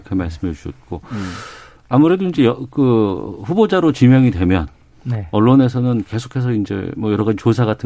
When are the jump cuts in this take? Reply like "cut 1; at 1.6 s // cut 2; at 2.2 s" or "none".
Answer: none